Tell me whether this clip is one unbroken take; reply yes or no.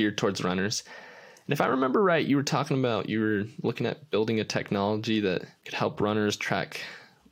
no